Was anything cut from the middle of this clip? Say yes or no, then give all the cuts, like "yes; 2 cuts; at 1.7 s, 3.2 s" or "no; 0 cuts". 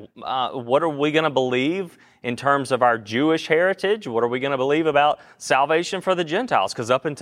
no; 0 cuts